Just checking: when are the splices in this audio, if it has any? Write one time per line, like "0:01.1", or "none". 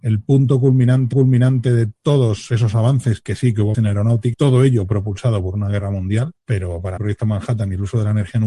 0:01.1
0:03.7
0:04.3
0:06.4
0:07.0